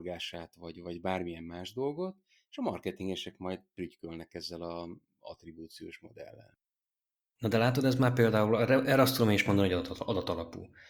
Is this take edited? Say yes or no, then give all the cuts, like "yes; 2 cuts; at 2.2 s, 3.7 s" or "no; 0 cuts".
no; 0 cuts